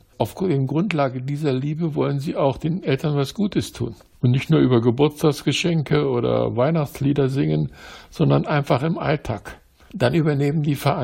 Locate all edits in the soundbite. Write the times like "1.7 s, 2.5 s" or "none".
none